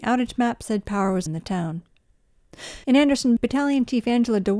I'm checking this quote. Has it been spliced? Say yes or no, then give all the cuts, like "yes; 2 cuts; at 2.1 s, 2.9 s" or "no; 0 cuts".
yes; 3 cuts; at 1.3 s, 2.8 s, 3.4 s